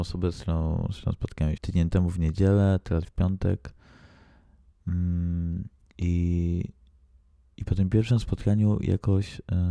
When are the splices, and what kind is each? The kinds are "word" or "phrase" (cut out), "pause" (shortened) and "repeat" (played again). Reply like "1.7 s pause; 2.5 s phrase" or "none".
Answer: 1.6 s phrase; 3.0 s phrase